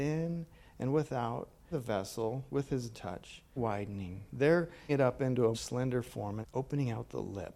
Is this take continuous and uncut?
no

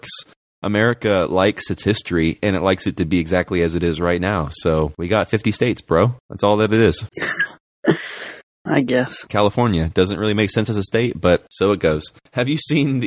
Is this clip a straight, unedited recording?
yes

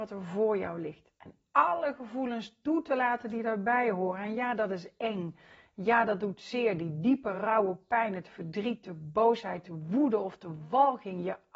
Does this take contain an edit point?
no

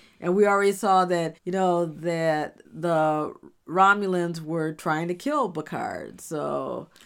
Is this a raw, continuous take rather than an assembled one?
no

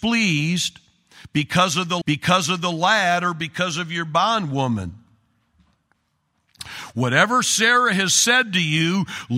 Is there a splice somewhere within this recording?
yes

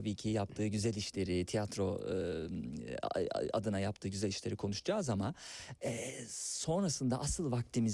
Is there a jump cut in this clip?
no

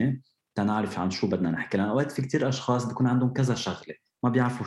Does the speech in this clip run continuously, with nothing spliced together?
yes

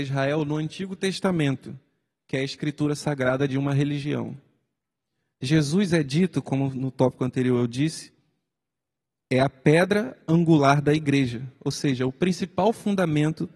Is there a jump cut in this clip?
no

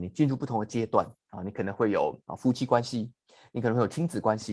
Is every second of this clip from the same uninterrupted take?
yes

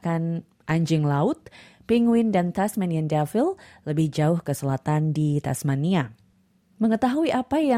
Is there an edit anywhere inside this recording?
no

